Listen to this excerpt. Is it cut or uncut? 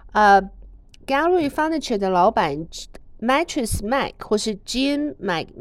uncut